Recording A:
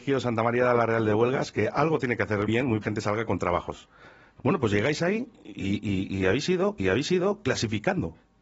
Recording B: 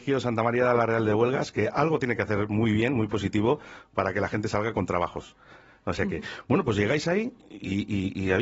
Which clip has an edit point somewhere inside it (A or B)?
A